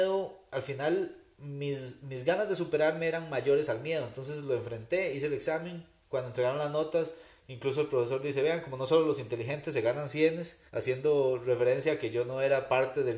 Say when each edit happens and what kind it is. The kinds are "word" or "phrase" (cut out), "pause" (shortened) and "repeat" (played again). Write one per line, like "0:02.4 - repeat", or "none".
0:10.7 - pause